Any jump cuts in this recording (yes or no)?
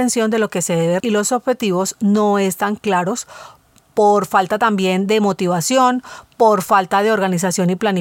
yes